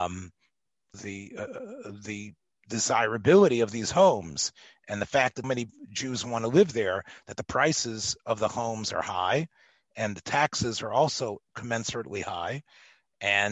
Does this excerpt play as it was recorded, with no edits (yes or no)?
no